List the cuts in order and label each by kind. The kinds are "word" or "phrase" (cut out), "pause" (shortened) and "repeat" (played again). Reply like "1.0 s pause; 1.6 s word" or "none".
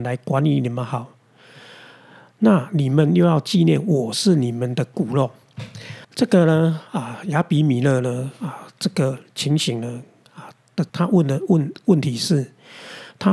6.0 s pause; 10.9 s pause

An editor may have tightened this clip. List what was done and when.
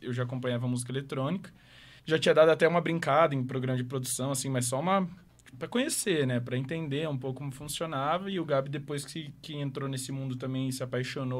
2.0 s pause; 5.5 s word

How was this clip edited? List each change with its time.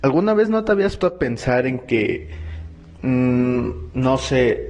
1.0 s word

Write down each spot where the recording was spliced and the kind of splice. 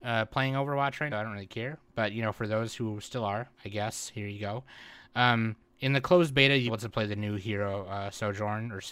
1.1 s phrase; 3.5 s pause; 5.6 s pause; 6.7 s phrase

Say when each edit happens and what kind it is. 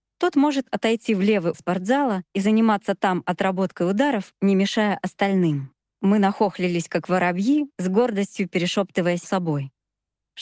1.5 s word; 2.3 s pause; 5.8 s pause; 7.7 s pause; 9.2 s word

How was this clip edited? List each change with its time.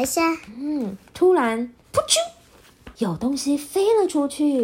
1.8 s pause; 2.9 s pause

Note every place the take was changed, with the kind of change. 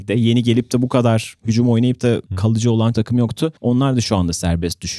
2.3 s pause; 2.9 s word; 3.6 s pause

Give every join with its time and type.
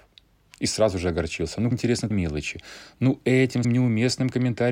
1.7 s word; 2.1 s word; 3.6 s word

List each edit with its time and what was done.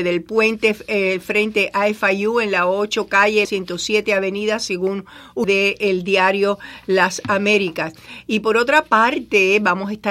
3.4 s word; 5.4 s word

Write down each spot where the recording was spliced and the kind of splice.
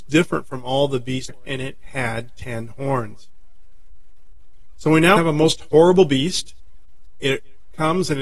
1.3 s word; 5.2 s word

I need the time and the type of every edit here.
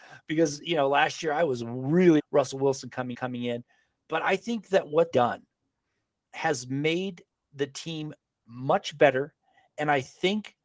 2.2 s word; 3.1 s repeat; 5.1 s word

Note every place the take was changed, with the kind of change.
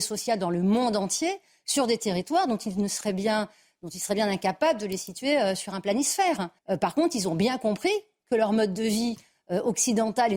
6.6 s pause

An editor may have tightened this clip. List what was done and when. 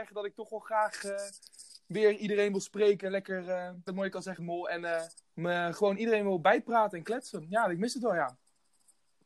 3.9 s phrase; 4.4 s word; 5.2 s pause

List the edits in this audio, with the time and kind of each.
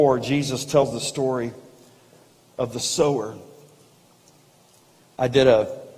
none

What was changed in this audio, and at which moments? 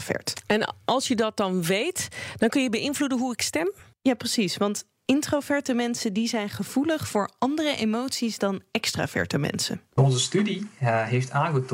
none

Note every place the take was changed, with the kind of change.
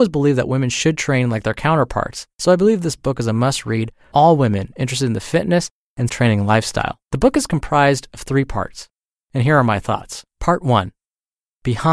2.3 s pause; 4.1 s word; 6.1 s word; 7.0 s pause; 10.3 s pause

